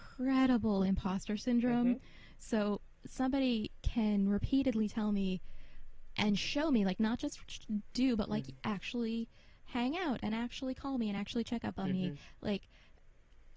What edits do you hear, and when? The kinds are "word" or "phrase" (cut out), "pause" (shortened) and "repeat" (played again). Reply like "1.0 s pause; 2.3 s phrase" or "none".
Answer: none